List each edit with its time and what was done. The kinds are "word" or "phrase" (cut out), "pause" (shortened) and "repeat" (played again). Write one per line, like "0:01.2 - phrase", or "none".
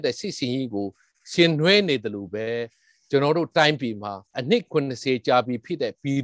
0:04.3 - pause